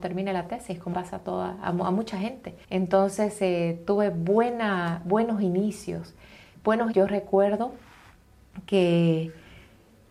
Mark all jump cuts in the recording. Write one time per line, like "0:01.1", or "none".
0:00.9
0:02.6
0:06.9